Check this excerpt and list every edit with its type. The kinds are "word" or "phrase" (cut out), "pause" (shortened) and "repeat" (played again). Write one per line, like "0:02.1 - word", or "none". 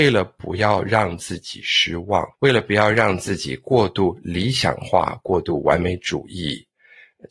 0:02.3 - pause